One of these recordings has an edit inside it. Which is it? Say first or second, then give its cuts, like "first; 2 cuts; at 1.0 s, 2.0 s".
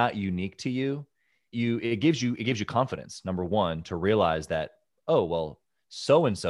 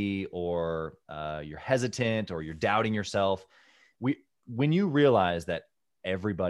first; 1 cut; at 1.5 s